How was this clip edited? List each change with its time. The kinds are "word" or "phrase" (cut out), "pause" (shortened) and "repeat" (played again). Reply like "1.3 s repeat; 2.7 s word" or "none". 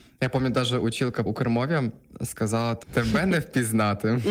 1.3 s word; 2.8 s phrase